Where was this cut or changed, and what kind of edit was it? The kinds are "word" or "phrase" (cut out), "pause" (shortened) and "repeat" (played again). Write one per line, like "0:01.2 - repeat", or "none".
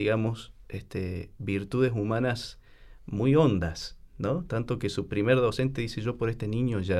none